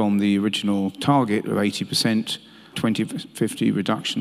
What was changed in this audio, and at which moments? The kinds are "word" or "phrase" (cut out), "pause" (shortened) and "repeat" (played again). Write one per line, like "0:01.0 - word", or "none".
0:02.7 - word